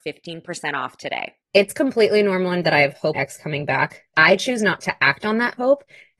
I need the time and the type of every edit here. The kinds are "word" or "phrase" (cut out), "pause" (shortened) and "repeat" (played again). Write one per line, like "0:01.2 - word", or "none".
0:01.4 - pause
0:02.6 - word
0:03.1 - phrase
0:04.1 - word